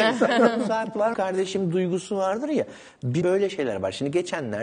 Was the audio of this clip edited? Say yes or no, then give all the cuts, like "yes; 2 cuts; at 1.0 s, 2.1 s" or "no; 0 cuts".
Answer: yes; 2 cuts; at 1.1 s, 3.2 s